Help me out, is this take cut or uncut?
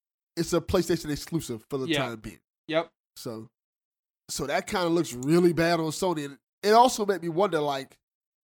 uncut